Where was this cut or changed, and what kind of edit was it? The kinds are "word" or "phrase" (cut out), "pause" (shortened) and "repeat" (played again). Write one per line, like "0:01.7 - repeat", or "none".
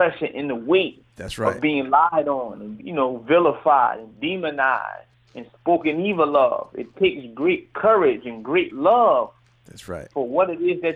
0:01.1 - pause
0:02.8 - word
0:05.1 - pause